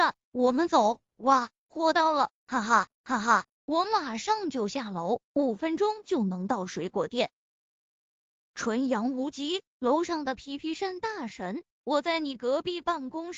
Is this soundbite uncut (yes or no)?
no